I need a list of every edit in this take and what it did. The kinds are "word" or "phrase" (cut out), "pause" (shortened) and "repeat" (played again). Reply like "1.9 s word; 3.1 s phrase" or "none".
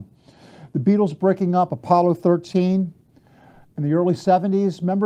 none